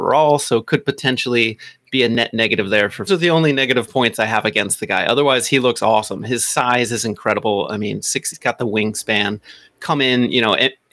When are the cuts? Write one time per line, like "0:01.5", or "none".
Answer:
0:03.1
0:08.3